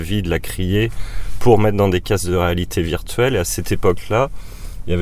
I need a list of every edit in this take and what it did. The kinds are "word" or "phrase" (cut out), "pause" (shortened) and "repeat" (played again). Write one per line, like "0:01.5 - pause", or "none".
none